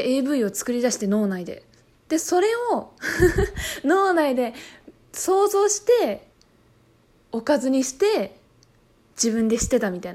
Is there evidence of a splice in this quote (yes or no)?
no